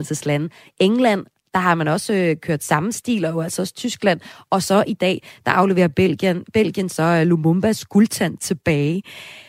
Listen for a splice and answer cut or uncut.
uncut